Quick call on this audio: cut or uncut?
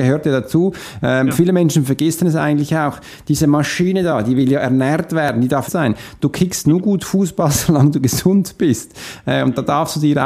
cut